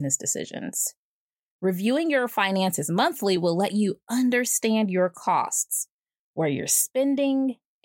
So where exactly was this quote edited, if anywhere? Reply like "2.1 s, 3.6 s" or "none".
none